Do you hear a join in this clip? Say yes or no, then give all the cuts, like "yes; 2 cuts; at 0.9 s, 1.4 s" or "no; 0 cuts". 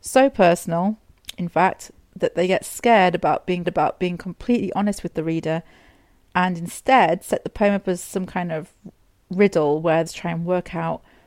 yes; 2 cuts; at 3.6 s, 10.1 s